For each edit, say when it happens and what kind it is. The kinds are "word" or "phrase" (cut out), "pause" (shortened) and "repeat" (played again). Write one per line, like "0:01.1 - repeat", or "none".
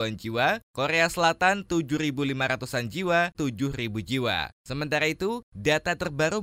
0:03.3 - phrase